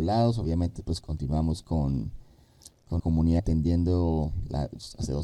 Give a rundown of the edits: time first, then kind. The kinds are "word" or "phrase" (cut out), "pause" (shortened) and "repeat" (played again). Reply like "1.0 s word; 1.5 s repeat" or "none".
1.0 s word; 3.0 s word; 3.4 s word